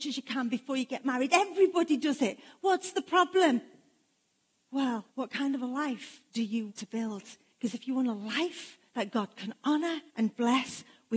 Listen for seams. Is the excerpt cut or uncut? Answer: cut